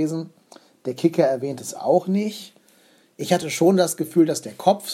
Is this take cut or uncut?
uncut